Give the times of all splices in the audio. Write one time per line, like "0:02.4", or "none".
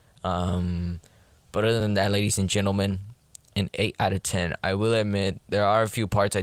none